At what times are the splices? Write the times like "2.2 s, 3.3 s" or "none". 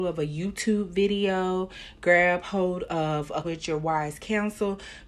3.4 s

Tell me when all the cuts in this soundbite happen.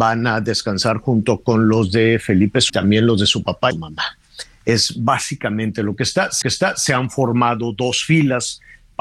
2.7 s, 3.7 s, 6.4 s

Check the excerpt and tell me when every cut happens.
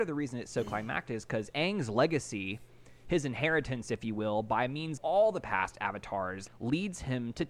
5.0 s, 6.5 s

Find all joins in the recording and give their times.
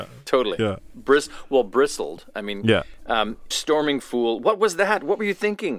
3.5 s

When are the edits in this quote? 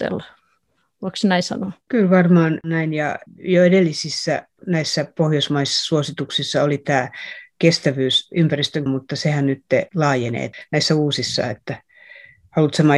1.8 s, 4.6 s, 8.9 s, 9.9 s

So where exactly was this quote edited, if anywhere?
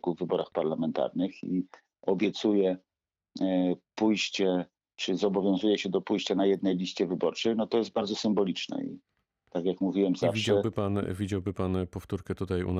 none

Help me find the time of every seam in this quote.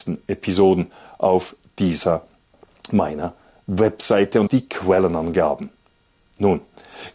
4.5 s

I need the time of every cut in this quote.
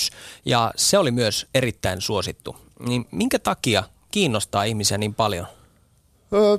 4.1 s

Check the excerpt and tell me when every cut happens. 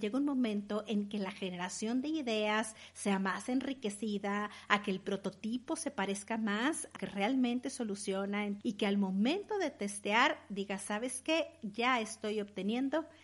7.0 s, 8.6 s

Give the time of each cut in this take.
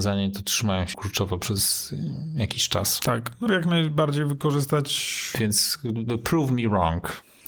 0.9 s, 3.5 s

